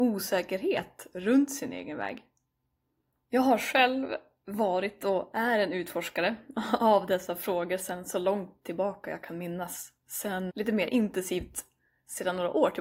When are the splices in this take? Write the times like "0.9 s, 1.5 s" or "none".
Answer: 10.5 s